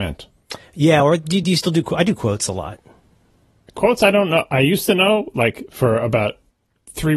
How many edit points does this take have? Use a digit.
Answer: 0